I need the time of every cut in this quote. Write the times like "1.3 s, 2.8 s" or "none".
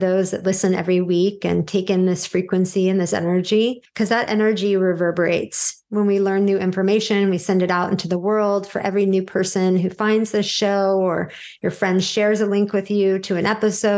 none